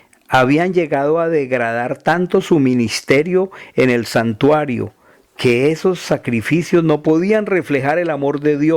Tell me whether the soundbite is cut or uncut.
uncut